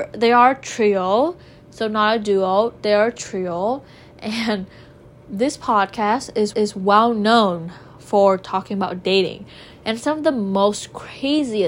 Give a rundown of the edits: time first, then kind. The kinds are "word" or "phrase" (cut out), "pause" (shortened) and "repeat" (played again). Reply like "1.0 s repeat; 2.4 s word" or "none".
6.5 s repeat